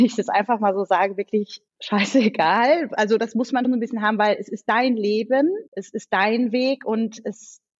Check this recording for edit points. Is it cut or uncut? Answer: cut